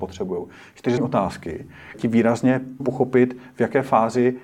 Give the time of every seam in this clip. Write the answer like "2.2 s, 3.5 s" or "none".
1.0 s, 1.9 s, 2.8 s

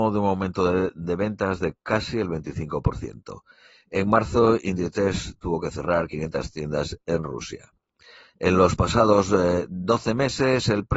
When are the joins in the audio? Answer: none

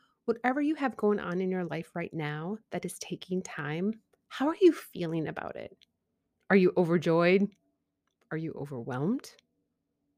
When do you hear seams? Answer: none

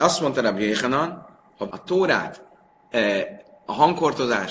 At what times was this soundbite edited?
1.7 s

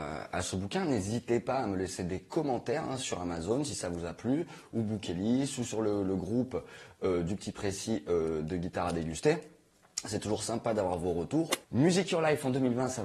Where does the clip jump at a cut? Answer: 11.6 s

